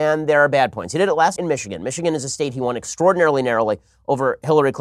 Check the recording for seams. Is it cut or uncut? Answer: cut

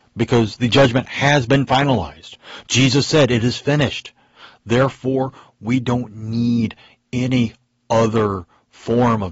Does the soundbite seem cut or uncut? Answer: uncut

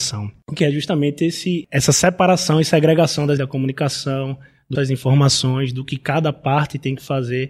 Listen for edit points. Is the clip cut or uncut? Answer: cut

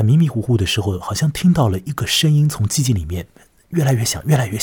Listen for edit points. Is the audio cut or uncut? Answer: uncut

